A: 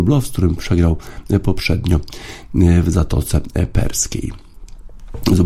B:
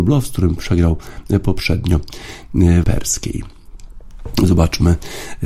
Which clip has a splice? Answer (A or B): B